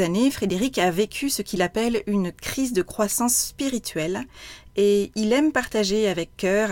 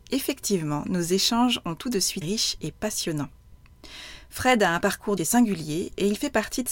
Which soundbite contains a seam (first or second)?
second